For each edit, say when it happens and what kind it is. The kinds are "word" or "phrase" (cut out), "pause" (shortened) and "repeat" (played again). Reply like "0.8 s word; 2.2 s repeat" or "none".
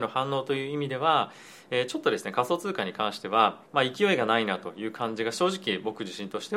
3.7 s pause